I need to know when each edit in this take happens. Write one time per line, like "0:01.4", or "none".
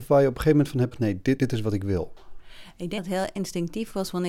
0:00.9
0:01.4
0:03.0